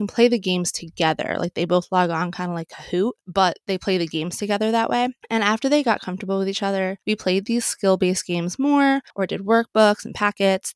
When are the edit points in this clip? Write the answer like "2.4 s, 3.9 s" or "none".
7.0 s, 9.1 s